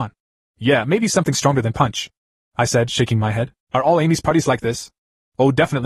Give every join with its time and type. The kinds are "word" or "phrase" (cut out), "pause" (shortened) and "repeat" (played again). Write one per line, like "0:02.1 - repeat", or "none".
0:03.6 - pause

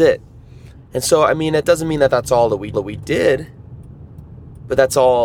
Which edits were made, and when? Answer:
0:02.7 - repeat

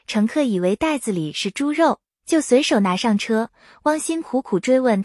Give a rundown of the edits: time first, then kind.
none

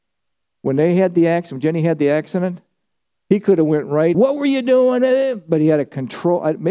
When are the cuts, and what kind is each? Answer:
0:04.1 - word

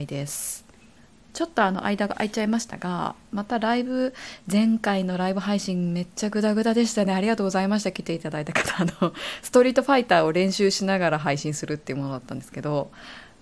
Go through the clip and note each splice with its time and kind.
0:01.0 - pause

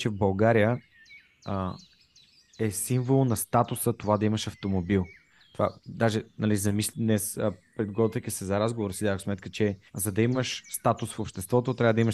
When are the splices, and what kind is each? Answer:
0:05.8 - pause
0:09.9 - pause

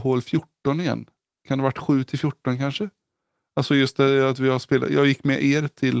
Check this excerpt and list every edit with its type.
none

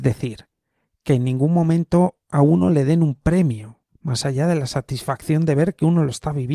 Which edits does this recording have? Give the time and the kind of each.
0:02.2 - pause
0:03.9 - pause

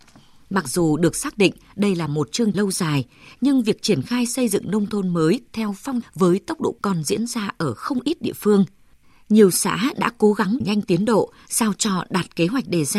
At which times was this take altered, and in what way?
0:02.5 - word
0:06.0 - word
0:06.8 - word
0:10.6 - word

